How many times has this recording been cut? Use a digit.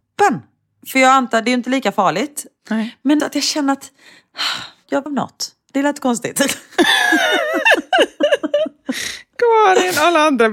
2